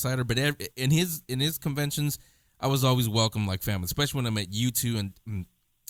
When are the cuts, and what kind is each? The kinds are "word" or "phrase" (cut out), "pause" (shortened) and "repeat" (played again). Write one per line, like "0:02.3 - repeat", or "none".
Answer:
none